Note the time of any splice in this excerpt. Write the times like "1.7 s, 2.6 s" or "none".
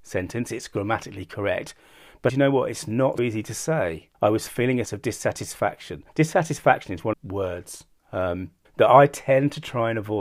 2.3 s, 3.2 s, 4.1 s, 4.8 s, 6.1 s, 7.1 s, 8.6 s